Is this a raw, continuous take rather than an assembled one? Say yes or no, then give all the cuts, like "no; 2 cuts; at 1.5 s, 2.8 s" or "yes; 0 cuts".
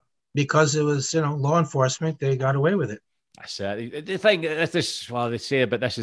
yes; 0 cuts